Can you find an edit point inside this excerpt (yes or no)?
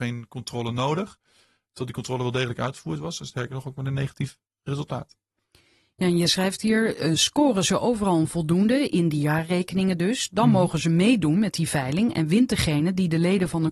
no